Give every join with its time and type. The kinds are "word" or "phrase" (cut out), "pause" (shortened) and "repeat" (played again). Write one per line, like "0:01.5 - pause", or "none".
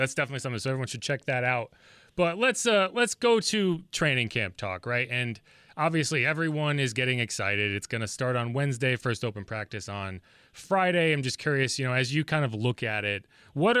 none